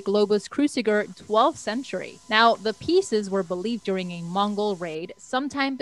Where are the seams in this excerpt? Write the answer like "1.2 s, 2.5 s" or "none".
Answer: 1.1 s, 2.2 s, 3.8 s